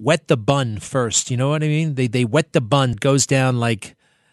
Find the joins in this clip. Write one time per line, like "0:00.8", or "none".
0:02.9